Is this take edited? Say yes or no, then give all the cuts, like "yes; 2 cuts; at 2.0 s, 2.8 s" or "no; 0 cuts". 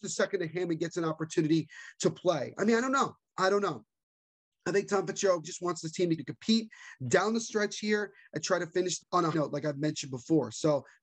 yes; 4 cuts; at 5.4 s, 6.2 s, 9.0 s, 9.3 s